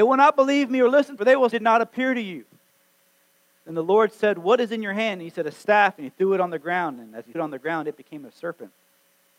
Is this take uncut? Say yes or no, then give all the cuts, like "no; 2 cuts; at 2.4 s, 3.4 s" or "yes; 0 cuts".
no; 3 cuts; at 1.2 s, 1.5 s, 7.3 s